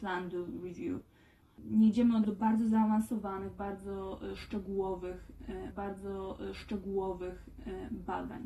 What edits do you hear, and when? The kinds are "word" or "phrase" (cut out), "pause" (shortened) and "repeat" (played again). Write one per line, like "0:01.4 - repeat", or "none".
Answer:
0:02.2 - word
0:05.7 - repeat